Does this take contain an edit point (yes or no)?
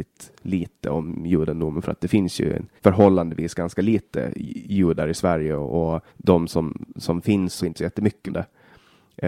yes